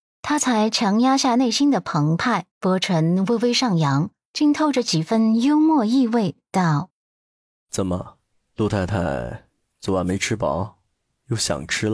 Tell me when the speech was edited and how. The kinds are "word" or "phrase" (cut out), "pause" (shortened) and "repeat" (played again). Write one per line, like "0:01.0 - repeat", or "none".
0:02.5 - pause
0:08.4 - pause